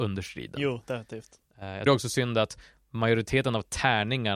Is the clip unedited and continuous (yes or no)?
no